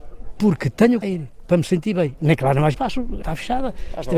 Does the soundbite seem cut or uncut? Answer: cut